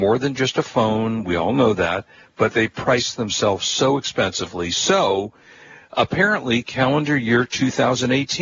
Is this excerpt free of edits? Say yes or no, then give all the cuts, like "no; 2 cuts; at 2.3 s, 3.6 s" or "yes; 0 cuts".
yes; 0 cuts